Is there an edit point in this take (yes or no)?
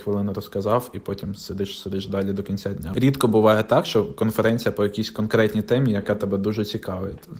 no